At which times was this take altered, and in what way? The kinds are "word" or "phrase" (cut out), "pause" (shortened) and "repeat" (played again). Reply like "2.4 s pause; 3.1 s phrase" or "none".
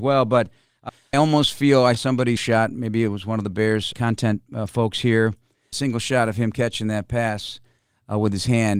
1.1 s word; 1.9 s word; 2.4 s word; 3.9 s word